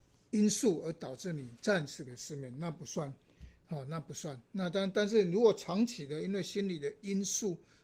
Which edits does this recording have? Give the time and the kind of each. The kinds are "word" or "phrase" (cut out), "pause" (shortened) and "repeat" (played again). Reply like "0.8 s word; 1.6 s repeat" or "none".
none